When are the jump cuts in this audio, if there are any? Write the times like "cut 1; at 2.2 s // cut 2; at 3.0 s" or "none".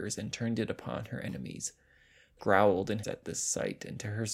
cut 1; at 2.4 s // cut 2; at 3.0 s